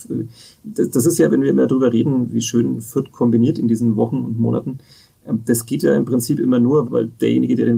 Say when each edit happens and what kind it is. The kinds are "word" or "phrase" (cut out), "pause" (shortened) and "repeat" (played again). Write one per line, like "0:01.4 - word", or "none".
0:02.3 - word
0:06.8 - word